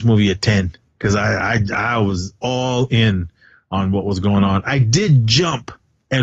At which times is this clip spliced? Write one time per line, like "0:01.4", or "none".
none

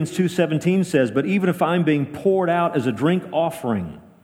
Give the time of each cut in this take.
none

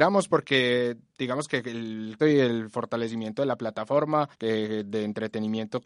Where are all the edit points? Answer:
0:02.2
0:04.3

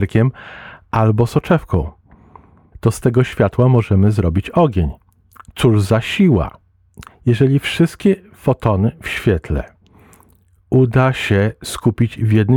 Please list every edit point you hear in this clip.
none

